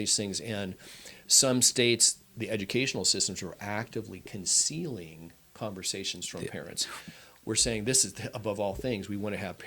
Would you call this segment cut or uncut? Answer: uncut